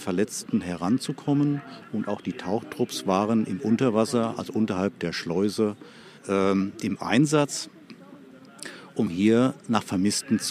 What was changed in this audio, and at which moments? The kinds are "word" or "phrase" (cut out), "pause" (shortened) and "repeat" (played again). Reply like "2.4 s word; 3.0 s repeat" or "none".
6.2 s pause